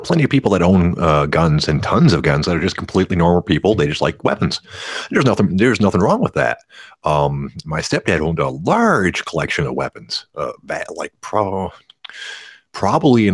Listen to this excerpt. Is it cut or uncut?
uncut